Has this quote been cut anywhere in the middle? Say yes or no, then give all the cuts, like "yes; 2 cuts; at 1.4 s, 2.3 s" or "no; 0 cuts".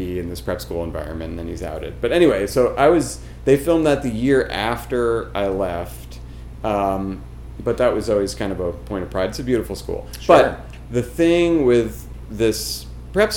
no; 0 cuts